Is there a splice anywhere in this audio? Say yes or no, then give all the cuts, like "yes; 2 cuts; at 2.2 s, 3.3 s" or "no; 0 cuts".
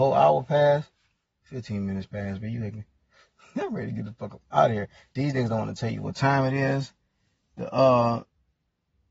no; 0 cuts